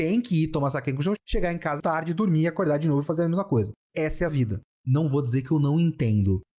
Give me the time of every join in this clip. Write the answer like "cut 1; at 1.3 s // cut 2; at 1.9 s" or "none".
cut 1; at 1.2 s // cut 2; at 1.8 s // cut 3; at 4.3 s